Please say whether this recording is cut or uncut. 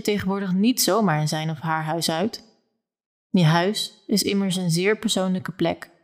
uncut